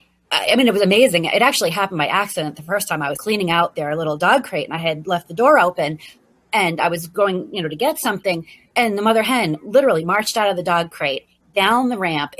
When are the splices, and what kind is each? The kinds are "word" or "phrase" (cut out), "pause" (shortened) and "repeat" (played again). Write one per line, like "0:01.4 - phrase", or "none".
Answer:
none